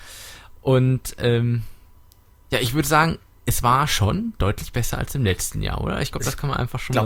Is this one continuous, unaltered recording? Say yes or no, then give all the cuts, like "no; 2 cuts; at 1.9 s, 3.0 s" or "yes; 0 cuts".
yes; 0 cuts